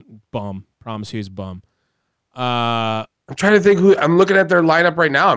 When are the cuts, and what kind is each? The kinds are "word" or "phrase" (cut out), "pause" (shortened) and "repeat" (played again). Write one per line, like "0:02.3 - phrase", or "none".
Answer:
none